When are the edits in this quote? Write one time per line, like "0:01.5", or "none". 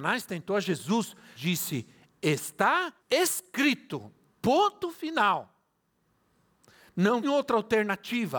0:01.4
0:03.0
0:07.2

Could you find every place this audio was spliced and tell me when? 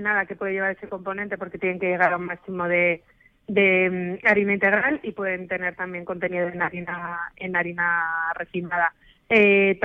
none

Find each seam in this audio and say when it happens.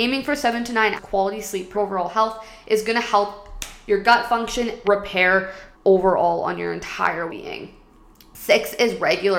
0:01.0
0:01.7
0:04.8
0:05.7
0:07.3

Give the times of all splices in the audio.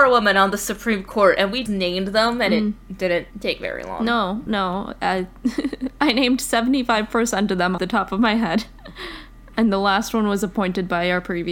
0:01.7
0:03.3
0:07.8

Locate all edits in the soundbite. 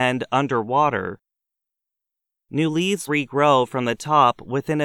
0:03.1

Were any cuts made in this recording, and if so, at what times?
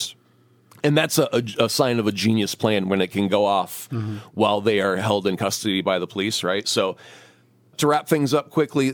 none

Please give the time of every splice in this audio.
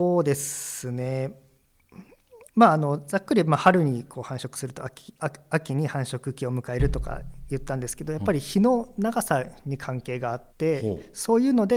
0:02.5
0:10.5

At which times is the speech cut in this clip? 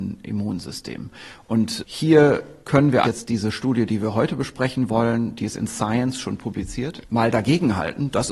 0:02.6
0:03.0

